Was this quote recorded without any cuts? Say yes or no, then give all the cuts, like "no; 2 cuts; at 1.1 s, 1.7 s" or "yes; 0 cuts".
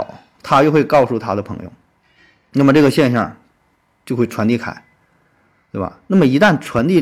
yes; 0 cuts